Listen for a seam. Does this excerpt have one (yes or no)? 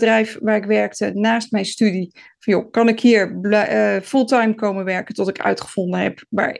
no